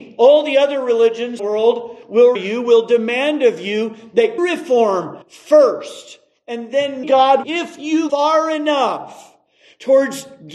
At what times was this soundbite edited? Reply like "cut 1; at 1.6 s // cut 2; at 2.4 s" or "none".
cut 1; at 1.4 s // cut 2; at 2.3 s // cut 3; at 4.4 s // cut 4; at 5.2 s // cut 5; at 7.0 s // cut 6; at 7.4 s // cut 7; at 8.1 s